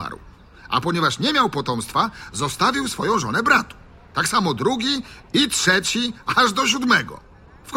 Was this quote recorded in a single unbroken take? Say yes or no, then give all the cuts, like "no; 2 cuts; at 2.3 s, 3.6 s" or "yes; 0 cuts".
yes; 0 cuts